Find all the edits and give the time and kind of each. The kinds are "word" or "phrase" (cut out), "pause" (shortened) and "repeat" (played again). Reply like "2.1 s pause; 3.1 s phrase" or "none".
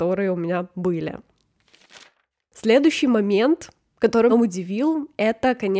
4.3 s word